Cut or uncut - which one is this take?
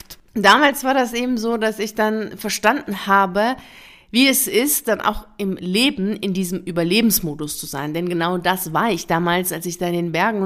uncut